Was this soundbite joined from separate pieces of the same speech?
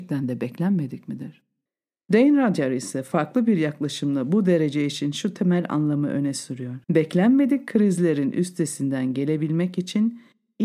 yes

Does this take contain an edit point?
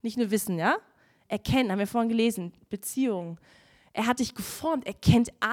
no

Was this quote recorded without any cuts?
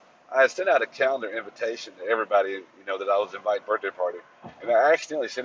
no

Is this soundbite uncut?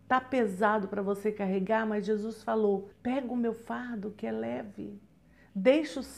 no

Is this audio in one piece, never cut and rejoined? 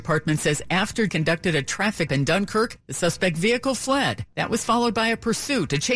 no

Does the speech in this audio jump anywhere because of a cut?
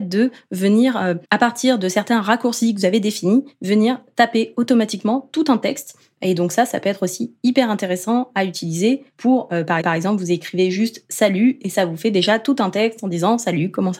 yes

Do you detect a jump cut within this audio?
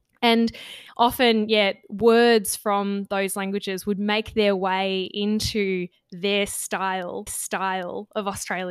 yes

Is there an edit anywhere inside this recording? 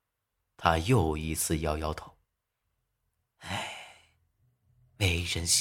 no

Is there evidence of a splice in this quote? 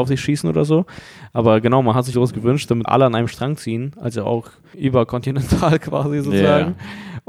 yes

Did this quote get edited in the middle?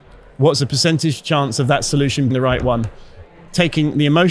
yes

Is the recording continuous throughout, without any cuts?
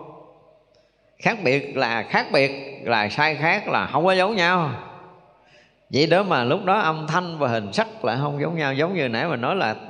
yes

